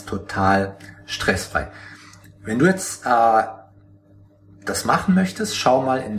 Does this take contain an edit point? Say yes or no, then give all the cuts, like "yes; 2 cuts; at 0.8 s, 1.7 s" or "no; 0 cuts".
no; 0 cuts